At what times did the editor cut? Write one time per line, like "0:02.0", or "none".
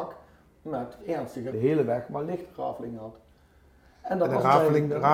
0:01.0
0:01.5